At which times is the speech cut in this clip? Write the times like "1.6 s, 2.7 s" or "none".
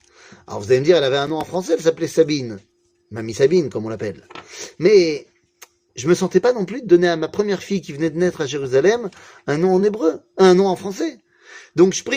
none